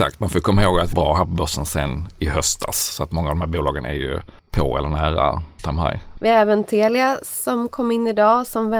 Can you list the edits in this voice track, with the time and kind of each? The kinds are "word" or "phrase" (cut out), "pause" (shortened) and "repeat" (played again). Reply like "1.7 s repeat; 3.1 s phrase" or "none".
0.9 s phrase; 4.4 s pause; 5.6 s word